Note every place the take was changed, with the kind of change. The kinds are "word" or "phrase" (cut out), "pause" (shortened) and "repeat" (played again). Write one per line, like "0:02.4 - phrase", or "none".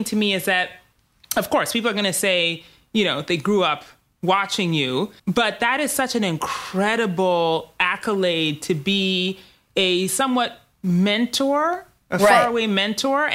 0:05.2 - pause